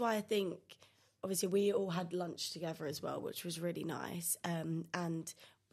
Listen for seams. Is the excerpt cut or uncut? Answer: uncut